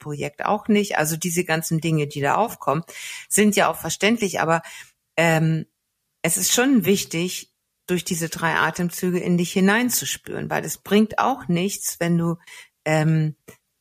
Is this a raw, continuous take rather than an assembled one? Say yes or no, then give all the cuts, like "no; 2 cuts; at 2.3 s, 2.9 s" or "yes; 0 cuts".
yes; 0 cuts